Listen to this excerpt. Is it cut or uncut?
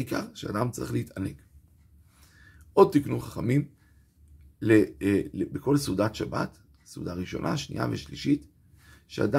uncut